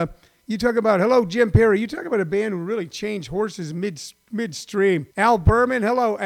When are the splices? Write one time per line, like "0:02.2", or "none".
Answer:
0:05.1